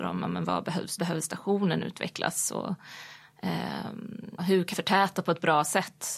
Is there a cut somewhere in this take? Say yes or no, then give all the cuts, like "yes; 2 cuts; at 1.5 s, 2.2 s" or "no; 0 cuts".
yes; 3 cuts; at 1.0 s, 4.4 s, 4.7 s